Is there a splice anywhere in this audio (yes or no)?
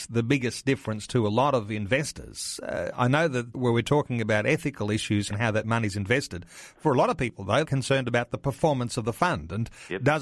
yes